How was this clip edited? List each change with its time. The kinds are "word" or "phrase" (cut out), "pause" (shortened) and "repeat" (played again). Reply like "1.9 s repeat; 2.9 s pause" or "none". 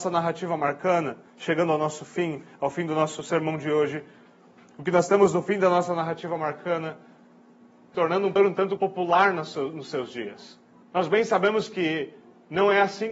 1.3 s pause; 7.9 s phrase; 8.4 s word; 8.8 s word; 10.8 s pause